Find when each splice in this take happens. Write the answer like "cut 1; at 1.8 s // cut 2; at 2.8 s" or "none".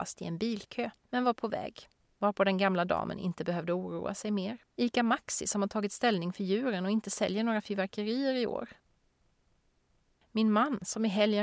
cut 1; at 1.0 s // cut 2; at 2.1 s // cut 3; at 4.7 s